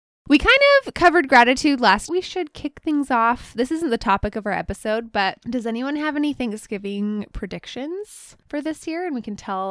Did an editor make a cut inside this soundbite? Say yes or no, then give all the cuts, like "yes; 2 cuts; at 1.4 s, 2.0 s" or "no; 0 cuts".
yes; 1 cut; at 2.1 s